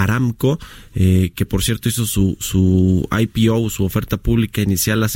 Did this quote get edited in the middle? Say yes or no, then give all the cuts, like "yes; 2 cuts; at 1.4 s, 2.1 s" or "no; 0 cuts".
no; 0 cuts